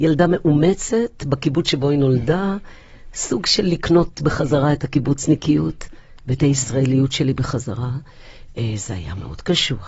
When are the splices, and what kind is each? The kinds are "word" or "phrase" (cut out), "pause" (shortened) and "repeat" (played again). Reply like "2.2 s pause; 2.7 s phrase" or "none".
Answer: none